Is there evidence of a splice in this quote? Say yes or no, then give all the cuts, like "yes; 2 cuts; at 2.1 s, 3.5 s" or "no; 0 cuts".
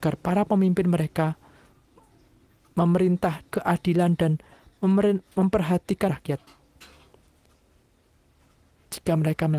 yes; 2 cuts; at 3.5 s, 6.1 s